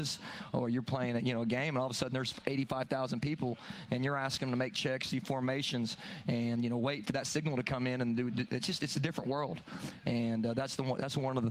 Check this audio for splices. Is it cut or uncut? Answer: uncut